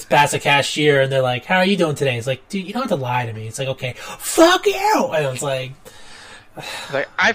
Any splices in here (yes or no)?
no